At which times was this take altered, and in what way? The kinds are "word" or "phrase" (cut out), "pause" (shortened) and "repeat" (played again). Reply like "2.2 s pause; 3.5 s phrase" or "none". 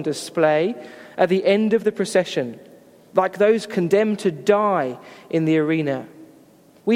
none